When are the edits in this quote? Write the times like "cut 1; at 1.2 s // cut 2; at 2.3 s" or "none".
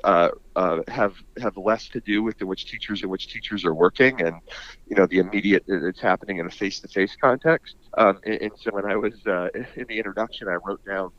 cut 1; at 2.4 s // cut 2; at 3.0 s // cut 3; at 5.6 s // cut 4; at 7.9 s // cut 5; at 8.7 s